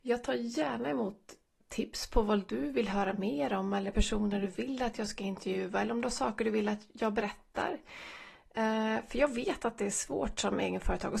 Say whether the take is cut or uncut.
uncut